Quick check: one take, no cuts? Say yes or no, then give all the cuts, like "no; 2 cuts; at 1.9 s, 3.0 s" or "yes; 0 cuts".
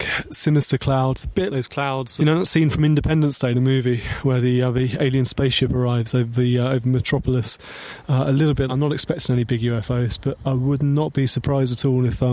no; 3 cuts; at 1.5 s, 2.2 s, 8.7 s